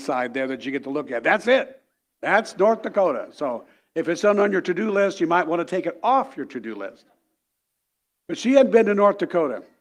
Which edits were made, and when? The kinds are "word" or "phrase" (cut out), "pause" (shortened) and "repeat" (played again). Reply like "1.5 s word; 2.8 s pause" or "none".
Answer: none